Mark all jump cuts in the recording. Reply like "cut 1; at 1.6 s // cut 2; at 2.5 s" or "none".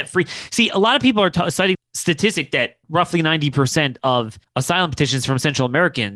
cut 1; at 1.7 s // cut 2; at 2.8 s // cut 3; at 4.4 s